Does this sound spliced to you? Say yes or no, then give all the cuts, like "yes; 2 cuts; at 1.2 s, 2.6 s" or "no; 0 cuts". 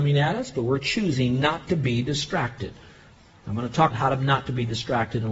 yes; 1 cut; at 3.9 s